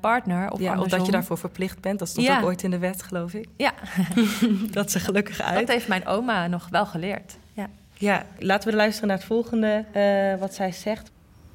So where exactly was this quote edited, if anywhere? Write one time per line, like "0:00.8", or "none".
none